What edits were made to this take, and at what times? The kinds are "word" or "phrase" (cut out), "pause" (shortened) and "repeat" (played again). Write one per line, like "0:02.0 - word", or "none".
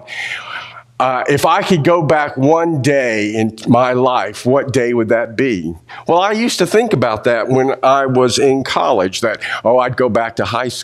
none